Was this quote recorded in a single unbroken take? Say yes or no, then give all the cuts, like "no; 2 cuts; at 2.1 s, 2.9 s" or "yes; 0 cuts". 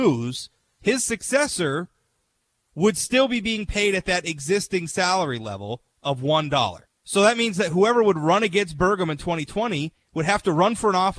no; 1 cut; at 6.8 s